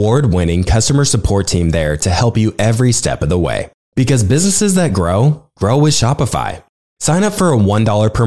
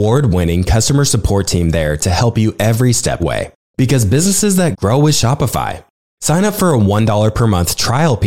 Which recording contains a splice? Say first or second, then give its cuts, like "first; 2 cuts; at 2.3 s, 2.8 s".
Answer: second; 2 cuts; at 3.2 s, 4.7 s